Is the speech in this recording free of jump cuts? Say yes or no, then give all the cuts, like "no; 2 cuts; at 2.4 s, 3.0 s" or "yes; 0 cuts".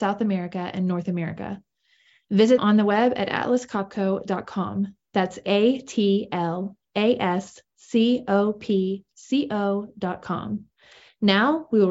no; 1 cut; at 2.6 s